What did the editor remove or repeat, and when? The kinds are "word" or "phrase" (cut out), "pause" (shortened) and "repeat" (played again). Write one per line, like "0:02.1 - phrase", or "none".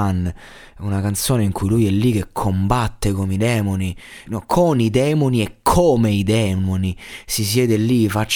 0:04.3 - word

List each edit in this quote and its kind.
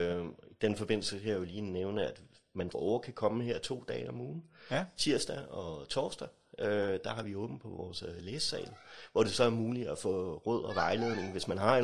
0:02.7 - word

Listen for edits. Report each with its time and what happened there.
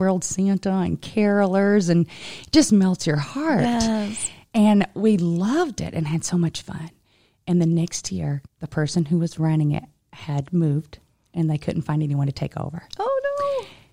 0:08.5 - pause

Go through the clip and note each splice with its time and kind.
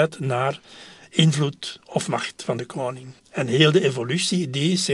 0:03.2 - pause

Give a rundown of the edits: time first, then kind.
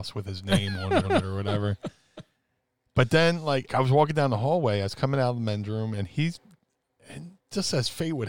0:01.0 - repeat
0:03.7 - word

